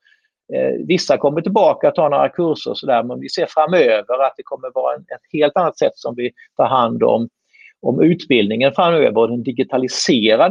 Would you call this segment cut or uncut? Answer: uncut